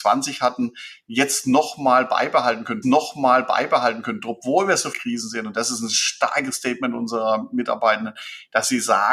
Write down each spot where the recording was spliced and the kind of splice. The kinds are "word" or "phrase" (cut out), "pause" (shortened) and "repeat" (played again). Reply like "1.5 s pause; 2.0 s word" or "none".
2.8 s repeat; 4.9 s word